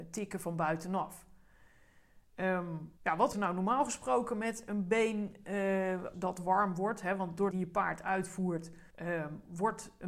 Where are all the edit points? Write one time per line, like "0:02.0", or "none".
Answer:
0:03.0
0:03.3
0:06.1
0:07.5
0:08.9